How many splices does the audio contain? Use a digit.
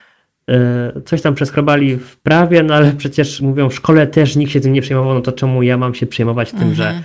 0